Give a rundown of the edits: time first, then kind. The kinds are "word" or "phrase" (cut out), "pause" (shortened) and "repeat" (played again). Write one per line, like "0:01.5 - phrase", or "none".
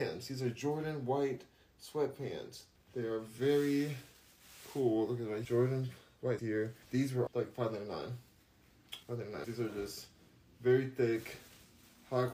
0:02.8 - pause
0:05.4 - word
0:06.4 - word
0:06.8 - pause
0:07.3 - word
0:09.0 - pause
0:09.4 - word

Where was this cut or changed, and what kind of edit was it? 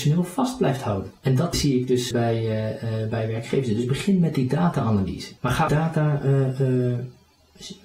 0:01.2 - pause
0:01.5 - word
0:02.1 - word
0:05.4 - pause
0:05.7 - word

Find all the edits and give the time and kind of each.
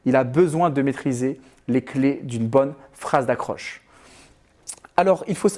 none

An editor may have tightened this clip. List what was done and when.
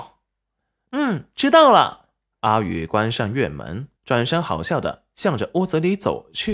0:02.3 - pause
0:04.0 - pause

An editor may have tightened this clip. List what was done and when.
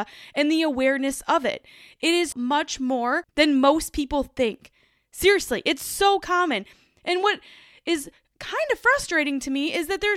0:02.3 - word
0:03.3 - word

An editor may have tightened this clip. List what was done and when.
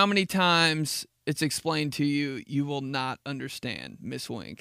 none

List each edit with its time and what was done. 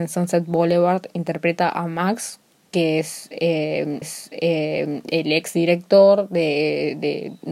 0:04.0 - repeat

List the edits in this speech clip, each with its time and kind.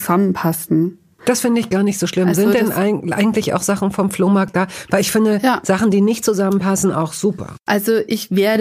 none

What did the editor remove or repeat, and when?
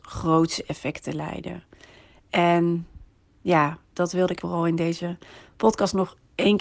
0:04.4 - word

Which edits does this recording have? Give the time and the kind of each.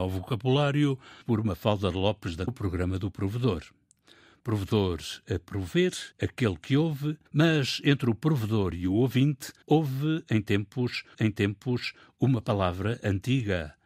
0:01.2 - word
0:02.5 - phrase
0:06.1 - pause
0:07.3 - pause
0:09.6 - pause
0:11.1 - repeat

